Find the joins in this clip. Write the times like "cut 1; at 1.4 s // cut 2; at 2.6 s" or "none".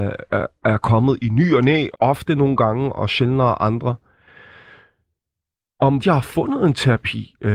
cut 1; at 1.9 s // cut 2; at 6.0 s

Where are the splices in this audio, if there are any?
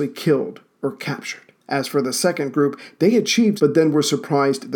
cut 1; at 1.6 s // cut 2; at 3.6 s

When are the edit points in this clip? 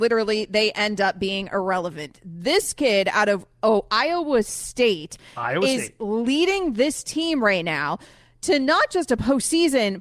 none

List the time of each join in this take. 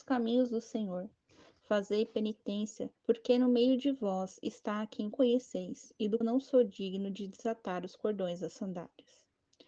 cut 1; at 3.0 s // cut 2; at 5.1 s // cut 3; at 6.2 s

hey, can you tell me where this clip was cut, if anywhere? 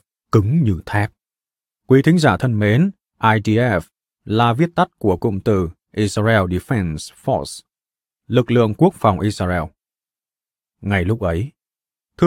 none

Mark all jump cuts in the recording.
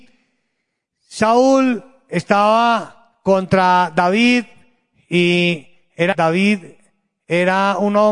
cut 1; at 6.1 s

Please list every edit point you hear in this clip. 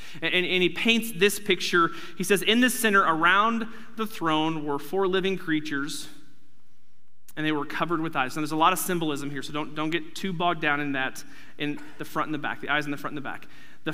none

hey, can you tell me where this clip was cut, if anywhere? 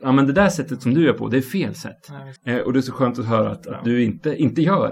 cut 1; at 2.4 s

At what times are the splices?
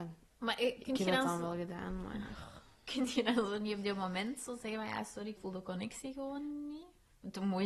cut 1; at 5.4 s

